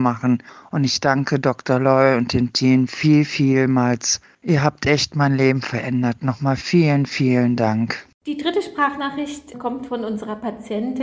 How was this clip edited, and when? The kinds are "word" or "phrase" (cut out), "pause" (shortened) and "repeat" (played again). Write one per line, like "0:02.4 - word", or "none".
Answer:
none